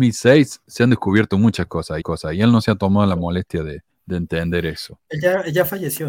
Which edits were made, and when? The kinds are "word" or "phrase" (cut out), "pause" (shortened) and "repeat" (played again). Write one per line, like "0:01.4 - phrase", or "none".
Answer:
0:02.0 - repeat
0:03.9 - pause